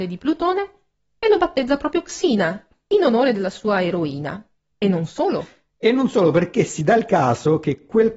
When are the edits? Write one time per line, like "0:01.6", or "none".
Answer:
none